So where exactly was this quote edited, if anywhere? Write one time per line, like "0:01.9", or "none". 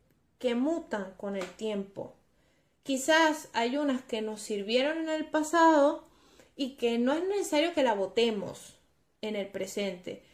none